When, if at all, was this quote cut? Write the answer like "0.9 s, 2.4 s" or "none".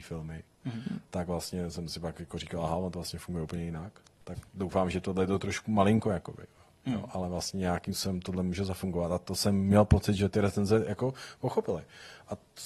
none